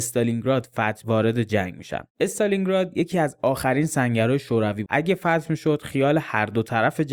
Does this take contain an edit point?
yes; 3 cuts; at 1.0 s, 2.1 s, 4.9 s

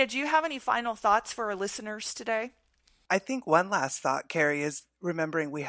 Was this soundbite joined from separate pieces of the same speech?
no; 0 cuts

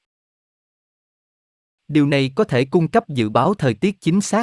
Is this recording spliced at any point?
no; 0 cuts

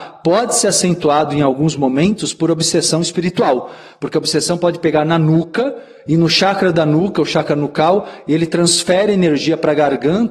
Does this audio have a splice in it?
no; 0 cuts

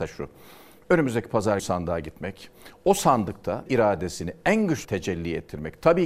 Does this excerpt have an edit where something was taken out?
yes; 3 cuts; at 1.6 s, 3.7 s, 4.8 s

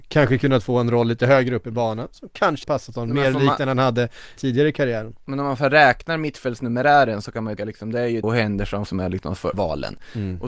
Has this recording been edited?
yes; 6 cuts; at 2.6 s, 4.4 s, 7.6 s, 8.2 s, 8.9 s, 9.5 s

